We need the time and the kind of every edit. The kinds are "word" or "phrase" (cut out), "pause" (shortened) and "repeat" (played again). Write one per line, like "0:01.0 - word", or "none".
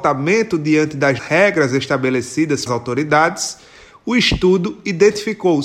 0:01.2 - word
0:02.7 - word

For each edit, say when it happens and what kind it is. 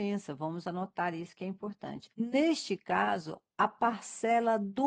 0:02.1 - pause

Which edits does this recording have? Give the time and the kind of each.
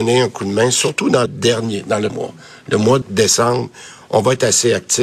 0:01.3 - word
0:02.1 - word
0:03.0 - word

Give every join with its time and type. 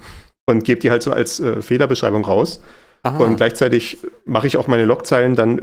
none

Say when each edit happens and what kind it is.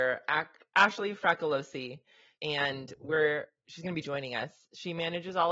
none

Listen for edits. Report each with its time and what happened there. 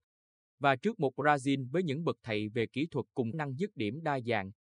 0:03.3 - word

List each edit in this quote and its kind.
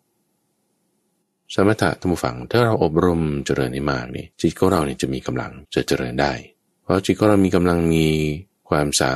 0:04.3 - pause
0:05.6 - pause
0:06.7 - pause

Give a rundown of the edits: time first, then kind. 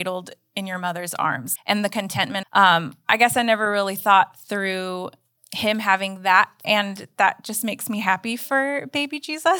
0:01.6 - word
0:02.4 - phrase
0:05.4 - word
0:06.6 - word

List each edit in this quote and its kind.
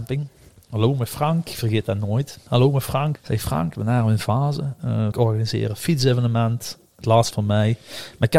0:03.1 - word
0:05.1 - phrase
0:07.3 - word

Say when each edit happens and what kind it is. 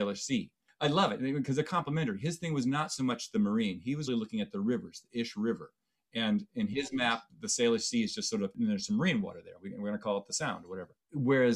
0:04.1 - word

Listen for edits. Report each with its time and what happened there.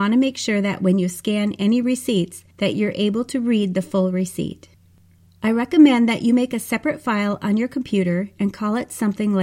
none

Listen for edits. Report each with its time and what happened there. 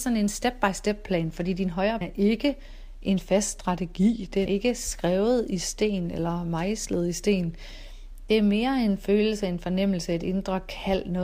0:02.0 - word
0:04.5 - word

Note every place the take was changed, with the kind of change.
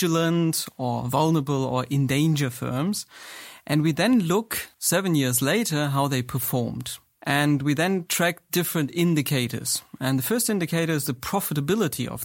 0:04.7 - pause

